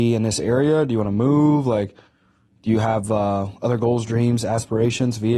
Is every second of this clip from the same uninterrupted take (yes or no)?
yes